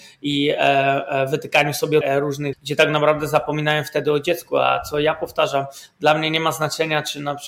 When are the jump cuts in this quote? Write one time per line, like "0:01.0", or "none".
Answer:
0:02.0
0:02.5

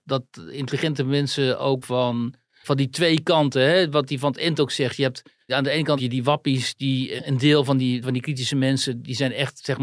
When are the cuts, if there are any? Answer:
0:01.8
0:02.6
0:04.1
0:05.5
0:06.0
0:07.2
0:08.0

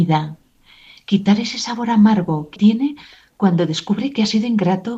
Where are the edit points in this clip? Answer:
0:02.6

